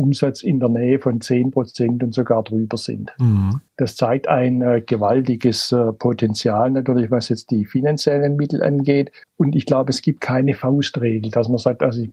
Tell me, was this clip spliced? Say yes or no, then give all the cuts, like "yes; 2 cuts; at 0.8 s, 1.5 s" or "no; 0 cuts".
yes; 2 cuts; at 3.7 s, 9.2 s